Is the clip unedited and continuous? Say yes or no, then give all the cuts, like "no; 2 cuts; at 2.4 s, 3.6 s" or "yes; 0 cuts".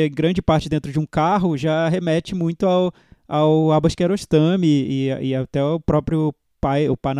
yes; 0 cuts